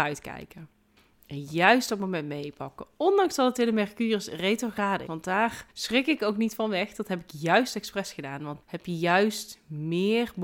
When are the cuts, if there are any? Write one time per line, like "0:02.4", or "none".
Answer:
0:05.1
0:05.7
0:08.6